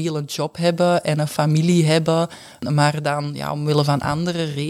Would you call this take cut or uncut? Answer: uncut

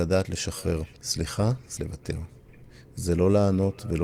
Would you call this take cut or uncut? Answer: cut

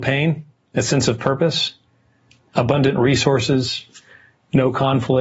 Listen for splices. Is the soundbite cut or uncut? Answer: uncut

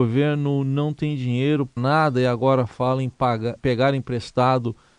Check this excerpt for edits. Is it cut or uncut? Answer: cut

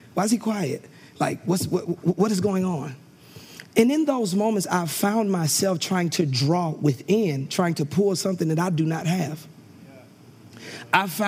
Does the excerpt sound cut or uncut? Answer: uncut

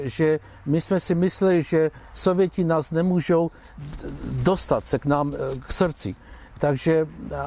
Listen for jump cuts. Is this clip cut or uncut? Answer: uncut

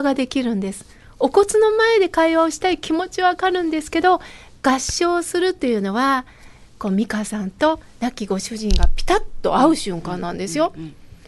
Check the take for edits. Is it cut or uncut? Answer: uncut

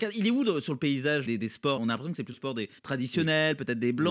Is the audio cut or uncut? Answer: cut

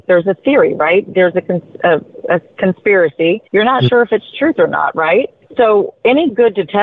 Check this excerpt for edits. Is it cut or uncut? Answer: cut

